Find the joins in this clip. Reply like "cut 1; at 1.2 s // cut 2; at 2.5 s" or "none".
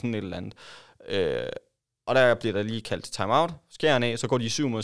none